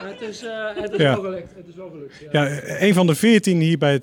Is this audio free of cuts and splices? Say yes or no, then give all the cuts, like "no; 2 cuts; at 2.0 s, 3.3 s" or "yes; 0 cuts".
yes; 0 cuts